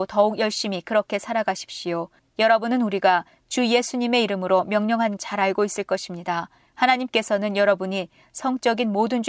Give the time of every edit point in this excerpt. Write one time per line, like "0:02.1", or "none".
0:05.2